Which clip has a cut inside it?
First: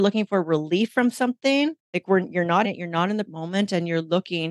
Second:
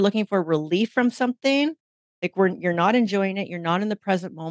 first; 3 cuts; at 1.8 s, 2.6 s, 3.3 s

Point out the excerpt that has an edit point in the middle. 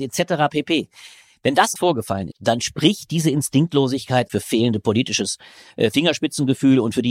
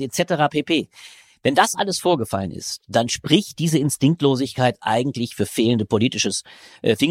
first; 3 cuts; at 1.8 s, 2.3 s, 4.3 s

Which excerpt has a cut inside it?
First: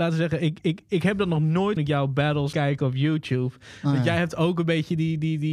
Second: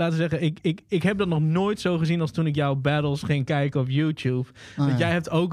first; 2 cuts; at 1.8 s, 2.5 s

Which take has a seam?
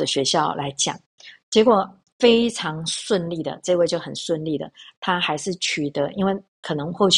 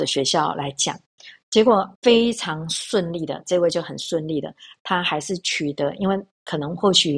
second; 1 cut; at 1.9 s

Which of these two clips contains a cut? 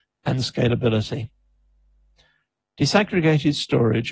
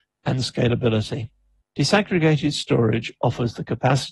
second; 1 cut; at 1.6 s

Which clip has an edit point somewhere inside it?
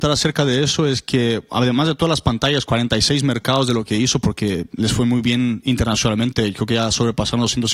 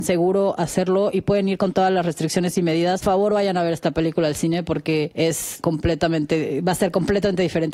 second; 1 cut; at 3.0 s

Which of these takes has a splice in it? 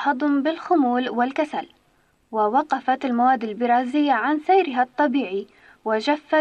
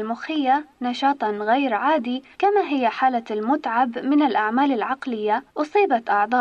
second; 2 cuts; at 2.3 s, 5.5 s

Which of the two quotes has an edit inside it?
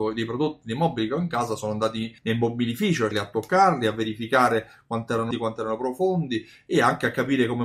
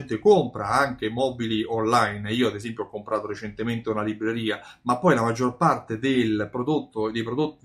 first; 3 cuts; at 2.2 s, 3.1 s, 5.3 s

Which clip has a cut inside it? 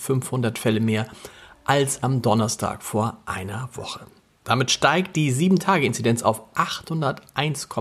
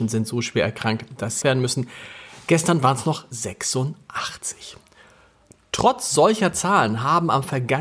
second; 1 cut; at 1.4 s

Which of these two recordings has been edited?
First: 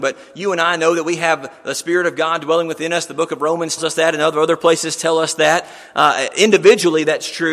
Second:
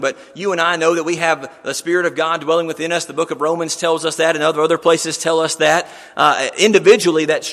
first; 1 cut; at 3.8 s

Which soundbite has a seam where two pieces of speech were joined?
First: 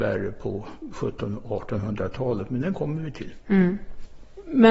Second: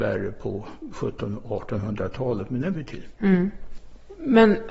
second; 1 cut; at 2.7 s

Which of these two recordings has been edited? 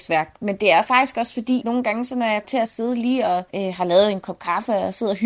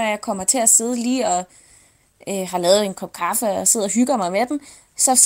first; 3 cuts; at 1.6 s, 2.4 s, 3.5 s

